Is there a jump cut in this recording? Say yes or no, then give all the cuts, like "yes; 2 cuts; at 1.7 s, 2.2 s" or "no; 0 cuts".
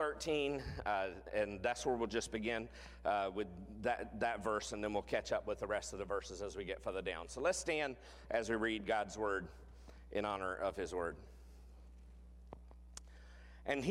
no; 0 cuts